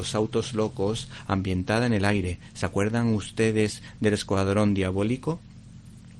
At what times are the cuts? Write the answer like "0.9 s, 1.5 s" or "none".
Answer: none